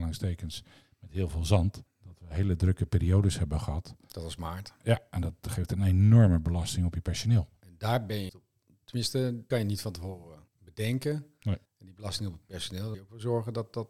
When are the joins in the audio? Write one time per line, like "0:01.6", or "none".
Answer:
0:01.9
0:07.6
0:08.3
0:09.5
0:10.5
0:11.7
0:12.9

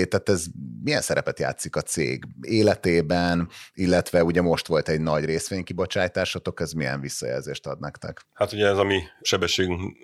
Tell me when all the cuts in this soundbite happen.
0:08.2

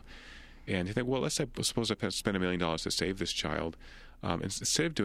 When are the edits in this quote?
none

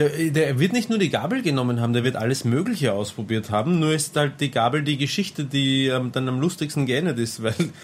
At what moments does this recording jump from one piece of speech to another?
none

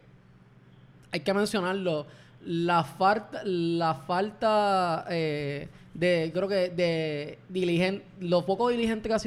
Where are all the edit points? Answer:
none

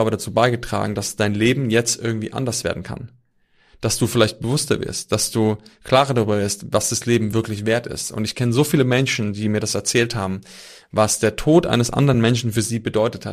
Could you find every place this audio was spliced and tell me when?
none

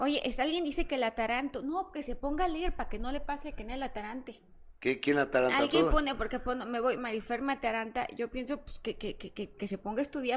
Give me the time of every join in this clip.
0:04.8

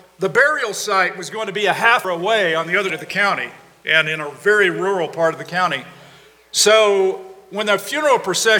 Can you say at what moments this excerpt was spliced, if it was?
0:02.0
0:02.9

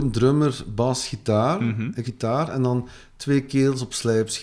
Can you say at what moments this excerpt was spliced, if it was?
0:02.0

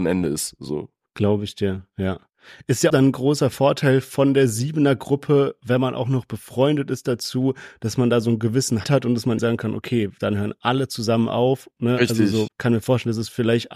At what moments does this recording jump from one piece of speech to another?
0:02.9
0:08.8
0:09.4
0:12.5

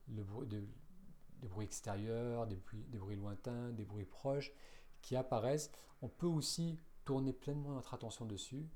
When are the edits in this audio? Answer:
none

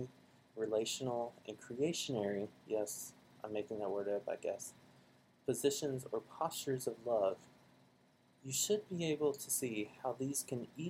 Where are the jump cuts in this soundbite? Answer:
none

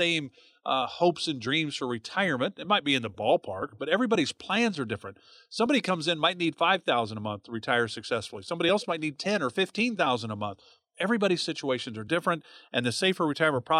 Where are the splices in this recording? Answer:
none

